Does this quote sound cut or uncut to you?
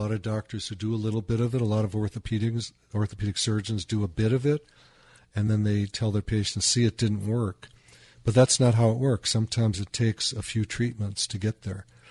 uncut